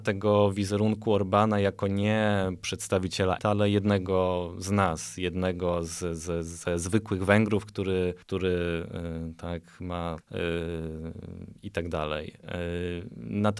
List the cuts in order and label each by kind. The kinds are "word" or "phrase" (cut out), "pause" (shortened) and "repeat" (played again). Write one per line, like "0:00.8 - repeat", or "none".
0:03.4 - word
0:08.2 - pause
0:10.2 - phrase